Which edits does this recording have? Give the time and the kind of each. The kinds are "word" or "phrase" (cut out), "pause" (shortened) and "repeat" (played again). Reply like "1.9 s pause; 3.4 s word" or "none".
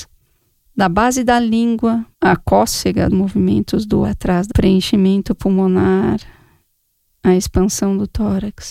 2.1 s pause; 3.1 s word; 4.0 s word; 4.5 s phrase